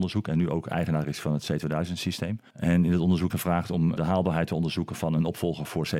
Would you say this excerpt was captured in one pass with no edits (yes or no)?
no